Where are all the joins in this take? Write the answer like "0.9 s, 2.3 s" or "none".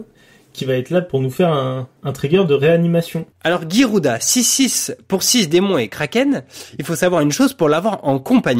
2.0 s, 3.3 s, 6.7 s